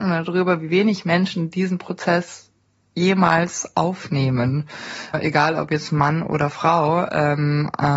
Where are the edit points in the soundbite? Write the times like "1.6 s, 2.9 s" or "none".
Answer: none